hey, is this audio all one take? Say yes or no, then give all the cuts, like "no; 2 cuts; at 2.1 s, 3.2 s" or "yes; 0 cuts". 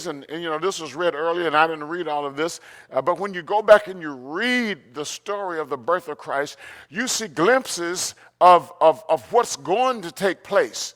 yes; 0 cuts